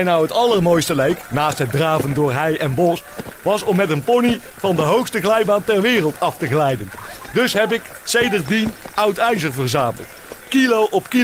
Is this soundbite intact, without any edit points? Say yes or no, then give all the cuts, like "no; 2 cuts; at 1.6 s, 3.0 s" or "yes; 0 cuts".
yes; 0 cuts